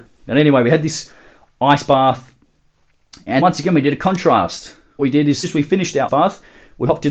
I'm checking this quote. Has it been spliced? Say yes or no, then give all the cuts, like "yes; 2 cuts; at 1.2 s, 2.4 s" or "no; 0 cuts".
yes; 4 cuts; at 3.4 s, 5.0 s, 5.4 s, 6.1 s